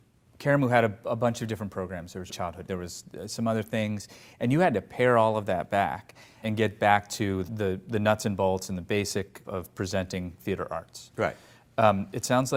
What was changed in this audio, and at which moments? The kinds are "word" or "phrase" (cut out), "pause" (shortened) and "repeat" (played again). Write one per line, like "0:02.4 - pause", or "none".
0:02.3 - word
0:02.7 - word
0:06.4 - word
0:07.5 - word
0:09.4 - word